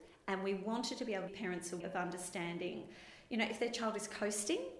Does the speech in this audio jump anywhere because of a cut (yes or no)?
yes